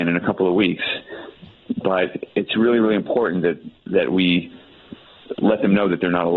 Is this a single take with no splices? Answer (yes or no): no